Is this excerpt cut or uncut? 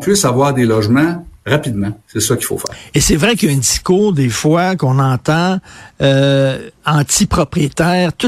uncut